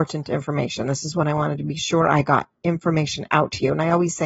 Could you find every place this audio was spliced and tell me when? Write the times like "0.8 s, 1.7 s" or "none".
none